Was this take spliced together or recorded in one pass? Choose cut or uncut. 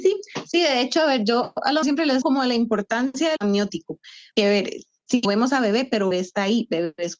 cut